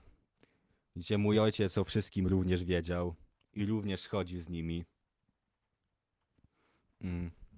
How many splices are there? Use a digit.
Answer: 0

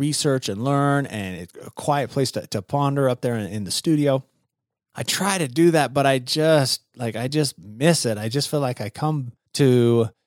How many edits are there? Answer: 0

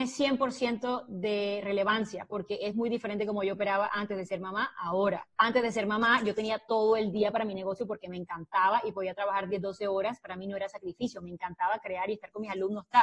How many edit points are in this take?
1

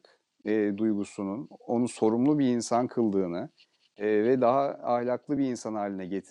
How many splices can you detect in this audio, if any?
0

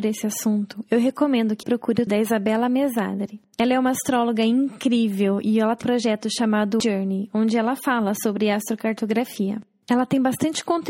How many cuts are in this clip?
4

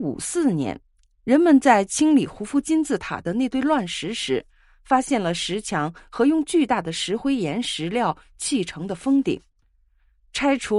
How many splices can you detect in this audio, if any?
0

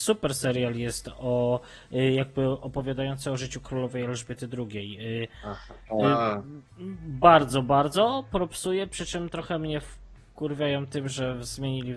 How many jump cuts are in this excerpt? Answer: 0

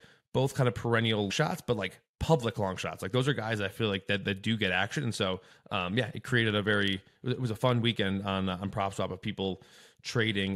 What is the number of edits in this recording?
1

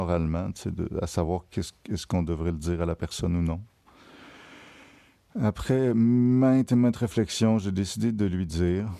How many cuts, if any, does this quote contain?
0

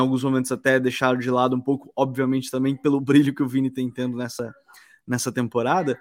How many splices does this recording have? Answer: 0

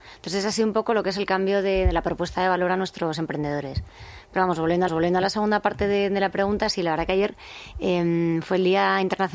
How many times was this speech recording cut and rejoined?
1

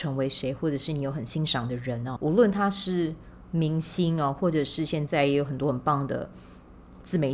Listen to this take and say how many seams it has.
1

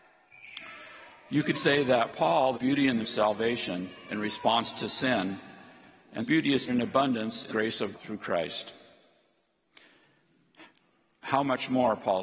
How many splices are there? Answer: 8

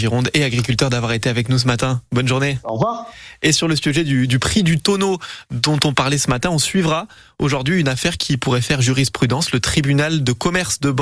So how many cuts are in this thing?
0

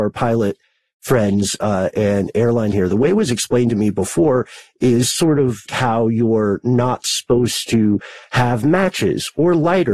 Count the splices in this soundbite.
2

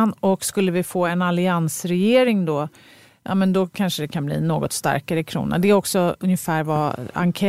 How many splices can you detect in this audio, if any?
0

